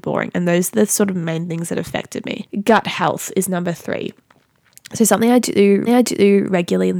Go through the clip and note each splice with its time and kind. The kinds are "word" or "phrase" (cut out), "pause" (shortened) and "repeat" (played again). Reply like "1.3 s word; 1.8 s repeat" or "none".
5.9 s repeat